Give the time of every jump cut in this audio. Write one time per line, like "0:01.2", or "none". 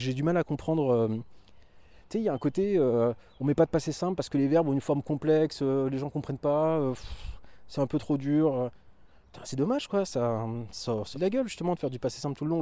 0:09.4
0:11.1

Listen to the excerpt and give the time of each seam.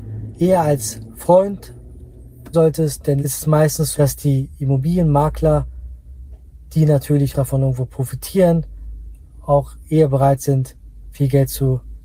0:01.1
0:02.5
0:03.2
0:03.9
0:07.3

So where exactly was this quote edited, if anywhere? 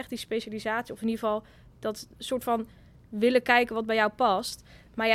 none

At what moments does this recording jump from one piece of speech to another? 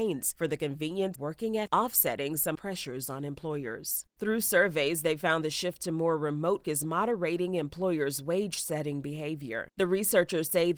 0:01.2
0:01.7
0:02.5
0:06.6

